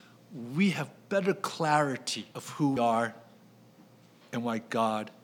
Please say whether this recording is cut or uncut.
cut